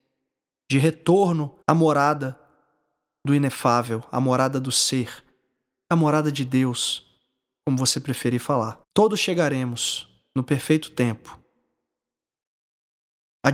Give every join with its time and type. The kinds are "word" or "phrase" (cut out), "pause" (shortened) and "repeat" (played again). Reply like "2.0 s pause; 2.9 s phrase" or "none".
1.6 s pause; 8.8 s pause